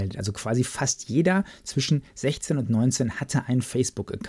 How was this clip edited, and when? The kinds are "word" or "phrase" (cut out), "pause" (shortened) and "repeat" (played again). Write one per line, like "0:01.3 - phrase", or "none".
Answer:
none